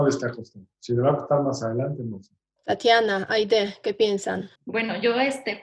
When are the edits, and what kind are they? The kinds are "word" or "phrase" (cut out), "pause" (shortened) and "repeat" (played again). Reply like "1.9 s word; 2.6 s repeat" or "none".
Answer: 2.6 s pause; 4.6 s pause